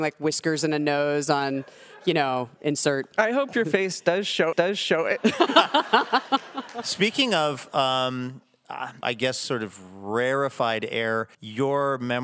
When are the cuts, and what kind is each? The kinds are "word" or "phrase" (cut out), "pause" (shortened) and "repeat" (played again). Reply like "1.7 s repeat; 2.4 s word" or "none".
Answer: 4.5 s repeat; 9.0 s phrase; 11.3 s pause